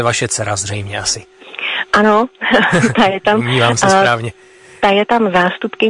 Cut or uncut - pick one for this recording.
uncut